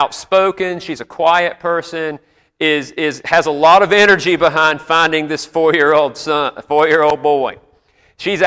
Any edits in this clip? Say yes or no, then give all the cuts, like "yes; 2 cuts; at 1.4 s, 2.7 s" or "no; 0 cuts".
no; 0 cuts